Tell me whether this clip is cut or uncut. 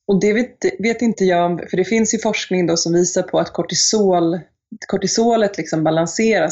uncut